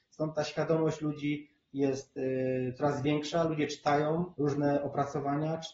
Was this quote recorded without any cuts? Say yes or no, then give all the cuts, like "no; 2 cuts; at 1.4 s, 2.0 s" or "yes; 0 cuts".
no; 1 cut; at 4.3 s